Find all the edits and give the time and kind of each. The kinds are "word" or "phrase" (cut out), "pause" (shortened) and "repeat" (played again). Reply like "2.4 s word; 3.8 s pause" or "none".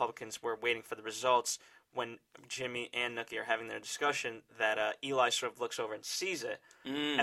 none